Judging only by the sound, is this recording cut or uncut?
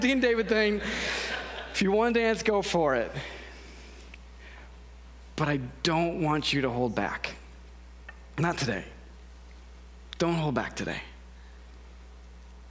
uncut